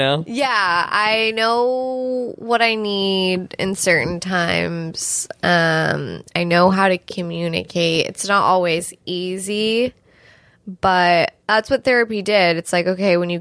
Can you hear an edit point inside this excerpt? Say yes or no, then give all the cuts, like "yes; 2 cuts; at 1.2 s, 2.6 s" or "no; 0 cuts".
yes; 1 cut; at 11.4 s